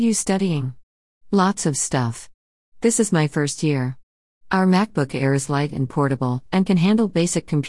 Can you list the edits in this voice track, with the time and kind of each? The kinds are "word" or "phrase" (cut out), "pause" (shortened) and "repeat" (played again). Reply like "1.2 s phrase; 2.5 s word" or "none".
none

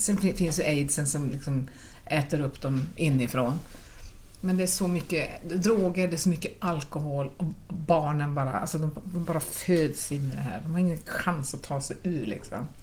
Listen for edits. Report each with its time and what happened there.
none

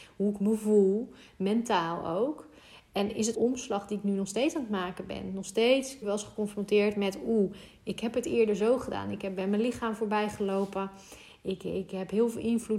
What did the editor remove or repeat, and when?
3.3 s phrase; 6.0 s phrase

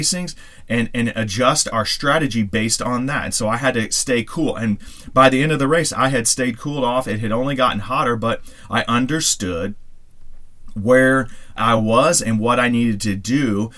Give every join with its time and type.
none

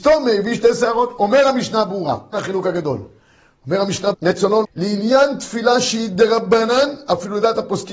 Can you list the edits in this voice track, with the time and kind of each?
2.3 s word; 4.1 s word; 4.6 s word

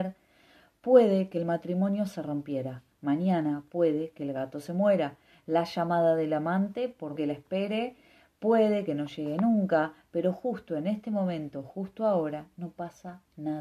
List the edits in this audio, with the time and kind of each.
7.1 s word

